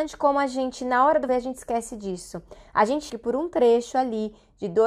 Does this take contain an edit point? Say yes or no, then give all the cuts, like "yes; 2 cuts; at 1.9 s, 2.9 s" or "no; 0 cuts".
yes; 2 cuts; at 1.3 s, 3.1 s